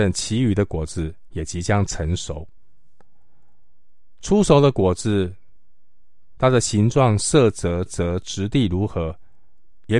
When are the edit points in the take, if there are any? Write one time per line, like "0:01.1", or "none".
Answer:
0:07.9